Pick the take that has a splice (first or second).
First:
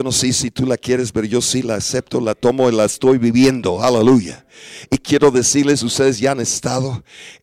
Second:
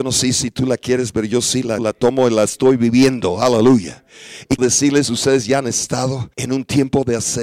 second